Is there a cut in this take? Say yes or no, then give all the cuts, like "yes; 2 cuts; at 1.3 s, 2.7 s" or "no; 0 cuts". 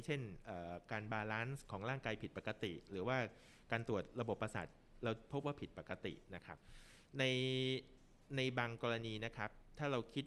no; 0 cuts